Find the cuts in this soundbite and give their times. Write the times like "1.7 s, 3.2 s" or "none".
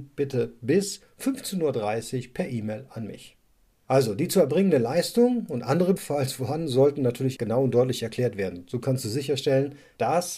6.0 s, 7.4 s